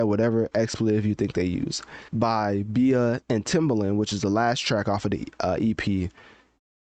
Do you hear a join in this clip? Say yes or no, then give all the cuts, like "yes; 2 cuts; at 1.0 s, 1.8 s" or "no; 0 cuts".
yes; 1 cut; at 2.1 s